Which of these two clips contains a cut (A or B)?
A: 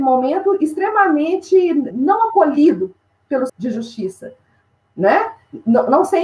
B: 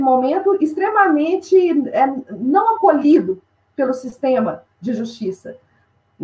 A